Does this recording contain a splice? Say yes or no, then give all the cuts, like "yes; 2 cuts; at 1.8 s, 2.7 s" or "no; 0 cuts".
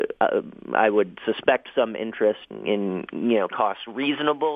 yes; 2 cuts; at 2.5 s, 3.5 s